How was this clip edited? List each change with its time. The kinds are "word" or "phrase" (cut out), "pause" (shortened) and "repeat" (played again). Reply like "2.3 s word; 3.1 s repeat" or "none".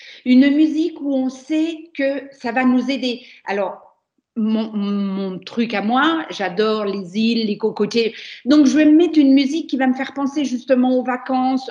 none